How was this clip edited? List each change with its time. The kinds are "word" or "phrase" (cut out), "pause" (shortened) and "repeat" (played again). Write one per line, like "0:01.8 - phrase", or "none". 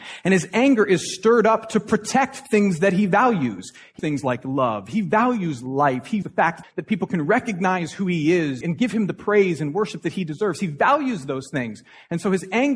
0:04.0 - word
0:06.2 - word
0:06.6 - word
0:08.6 - word